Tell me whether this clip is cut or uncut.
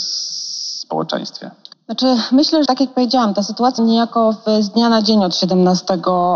cut